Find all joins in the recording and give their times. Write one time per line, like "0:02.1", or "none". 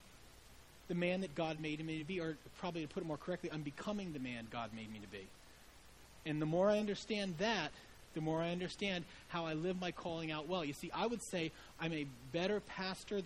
none